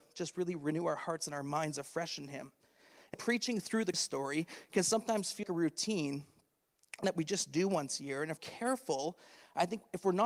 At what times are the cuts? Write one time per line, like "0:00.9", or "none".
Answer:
0:03.1
0:03.9
0:05.4
0:07.0
0:08.4